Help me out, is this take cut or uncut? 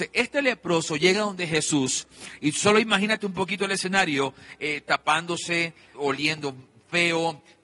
cut